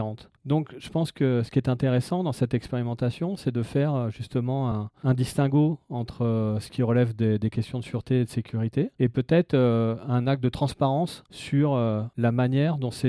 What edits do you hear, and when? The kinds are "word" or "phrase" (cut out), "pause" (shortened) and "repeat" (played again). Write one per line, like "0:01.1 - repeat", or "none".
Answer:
none